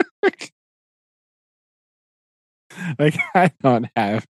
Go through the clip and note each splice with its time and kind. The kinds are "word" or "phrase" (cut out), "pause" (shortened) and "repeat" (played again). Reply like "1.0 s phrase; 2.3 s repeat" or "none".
none